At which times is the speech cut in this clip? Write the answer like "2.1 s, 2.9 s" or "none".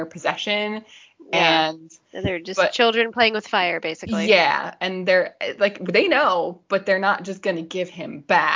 none